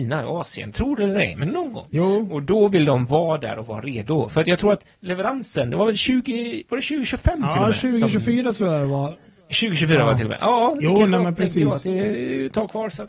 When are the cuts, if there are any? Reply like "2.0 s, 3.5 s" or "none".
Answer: none